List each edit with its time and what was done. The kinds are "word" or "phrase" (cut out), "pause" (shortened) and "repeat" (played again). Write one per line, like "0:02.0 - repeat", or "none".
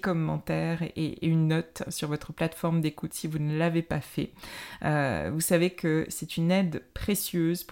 none